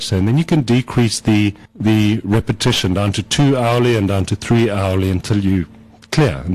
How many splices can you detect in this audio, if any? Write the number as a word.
one